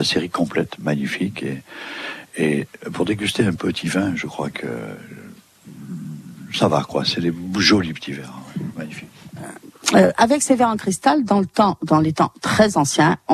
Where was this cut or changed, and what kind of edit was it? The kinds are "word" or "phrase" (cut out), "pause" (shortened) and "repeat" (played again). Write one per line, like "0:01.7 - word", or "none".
0:03.6 - word